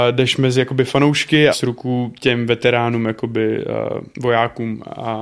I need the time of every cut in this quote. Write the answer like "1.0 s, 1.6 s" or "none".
1.5 s, 4.1 s